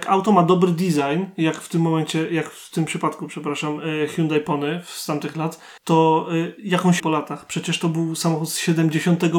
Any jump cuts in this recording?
yes; 2 cuts; at 5.8 s, 7.0 s

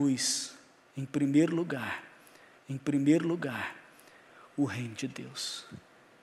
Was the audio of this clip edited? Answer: yes; 1 cut; at 2.6 s

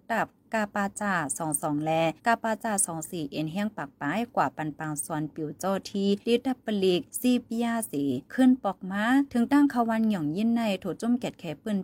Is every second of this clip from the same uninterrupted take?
no; 4 cuts; at 2.2 s, 6.2 s, 7.1 s, 8.3 s

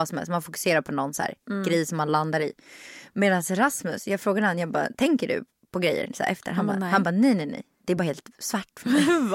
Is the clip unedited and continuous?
yes; 0 cuts

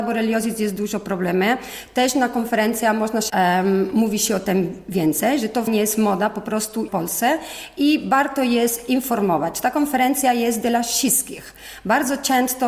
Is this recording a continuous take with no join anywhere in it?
no; 3 cuts; at 3.3 s, 5.7 s, 6.9 s

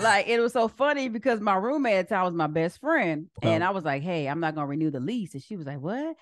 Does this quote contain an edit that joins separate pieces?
no; 0 cuts

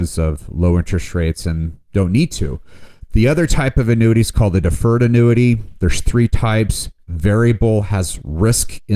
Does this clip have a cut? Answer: no; 0 cuts

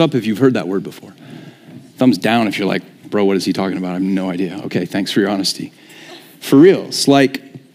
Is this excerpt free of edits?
yes; 0 cuts

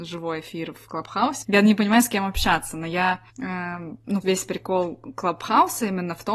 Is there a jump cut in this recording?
yes; 3 cuts; at 1.4 s, 3.3 s, 4.2 s

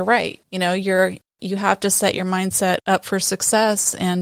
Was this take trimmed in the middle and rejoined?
no; 0 cuts

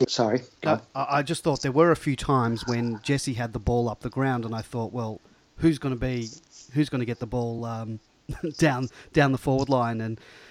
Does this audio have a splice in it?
no; 0 cuts

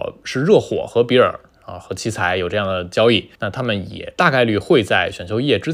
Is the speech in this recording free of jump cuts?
no; 1 cut; at 3.3 s

